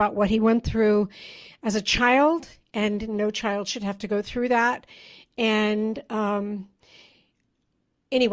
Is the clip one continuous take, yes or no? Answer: yes